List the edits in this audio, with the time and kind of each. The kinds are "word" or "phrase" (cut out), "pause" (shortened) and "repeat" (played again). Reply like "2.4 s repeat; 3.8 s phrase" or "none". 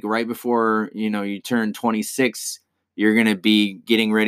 none